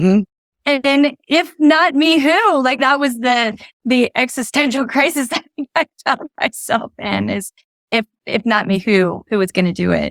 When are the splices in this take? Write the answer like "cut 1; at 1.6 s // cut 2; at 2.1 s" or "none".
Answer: cut 1; at 2.8 s